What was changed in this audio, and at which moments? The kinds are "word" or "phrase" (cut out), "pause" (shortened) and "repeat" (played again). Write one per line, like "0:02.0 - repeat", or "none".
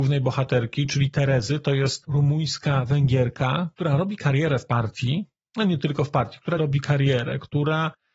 0:06.6 - word